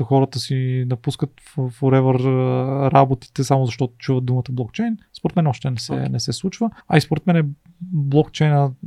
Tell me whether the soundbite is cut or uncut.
cut